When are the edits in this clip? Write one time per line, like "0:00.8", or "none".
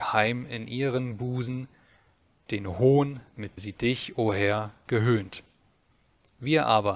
0:03.6